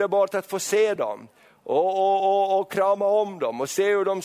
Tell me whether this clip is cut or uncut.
uncut